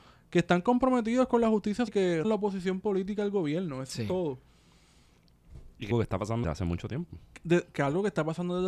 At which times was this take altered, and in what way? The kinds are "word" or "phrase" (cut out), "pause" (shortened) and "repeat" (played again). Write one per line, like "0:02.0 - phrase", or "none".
0:01.9 - word
0:02.2 - word
0:05.9 - word
0:06.4 - word